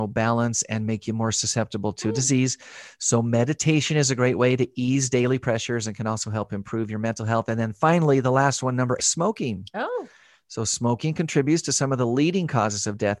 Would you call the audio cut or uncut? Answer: cut